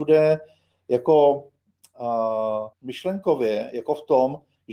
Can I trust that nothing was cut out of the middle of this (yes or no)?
no